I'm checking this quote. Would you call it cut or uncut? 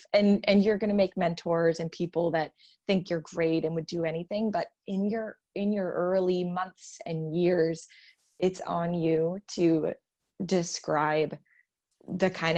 uncut